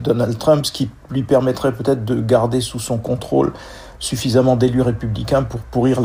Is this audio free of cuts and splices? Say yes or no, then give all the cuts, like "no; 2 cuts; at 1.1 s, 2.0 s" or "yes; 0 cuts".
yes; 0 cuts